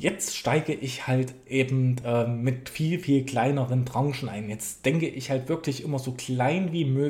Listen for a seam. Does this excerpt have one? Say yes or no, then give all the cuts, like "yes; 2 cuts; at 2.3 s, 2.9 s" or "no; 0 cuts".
no; 0 cuts